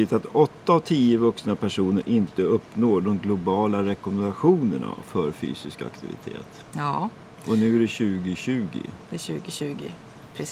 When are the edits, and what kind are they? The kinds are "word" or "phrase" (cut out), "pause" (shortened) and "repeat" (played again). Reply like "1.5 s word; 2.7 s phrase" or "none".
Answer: none